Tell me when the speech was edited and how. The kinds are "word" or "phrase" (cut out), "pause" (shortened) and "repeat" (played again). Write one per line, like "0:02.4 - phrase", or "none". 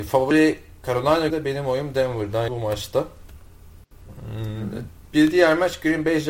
0:01.3 - word
0:02.5 - word